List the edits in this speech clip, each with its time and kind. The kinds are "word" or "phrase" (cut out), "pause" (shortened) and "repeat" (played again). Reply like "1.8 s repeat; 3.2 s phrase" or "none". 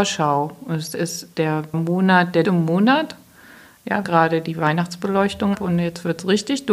1.7 s word; 2.4 s word; 4.0 s phrase; 5.5 s word